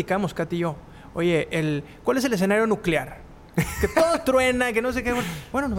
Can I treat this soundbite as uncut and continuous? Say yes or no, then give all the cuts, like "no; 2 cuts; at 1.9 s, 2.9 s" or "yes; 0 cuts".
yes; 0 cuts